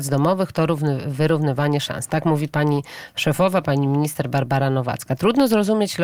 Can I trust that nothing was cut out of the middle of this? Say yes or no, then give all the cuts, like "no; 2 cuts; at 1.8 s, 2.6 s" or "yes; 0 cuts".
yes; 0 cuts